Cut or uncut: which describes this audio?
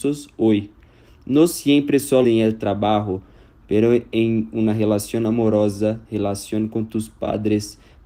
cut